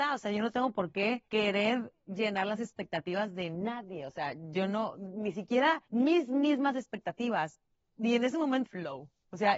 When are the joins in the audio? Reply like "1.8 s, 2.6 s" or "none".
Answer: 1.3 s, 5.9 s, 8.6 s